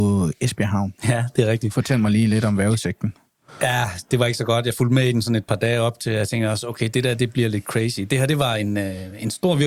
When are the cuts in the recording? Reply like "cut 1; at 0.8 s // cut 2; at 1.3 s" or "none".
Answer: cut 1; at 1.0 s